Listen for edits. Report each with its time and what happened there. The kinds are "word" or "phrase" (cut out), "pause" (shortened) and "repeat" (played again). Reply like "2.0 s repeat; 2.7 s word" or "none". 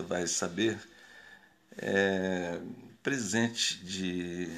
2.9 s word